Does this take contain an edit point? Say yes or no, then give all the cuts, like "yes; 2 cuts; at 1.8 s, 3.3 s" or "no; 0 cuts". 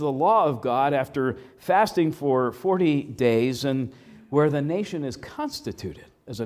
no; 0 cuts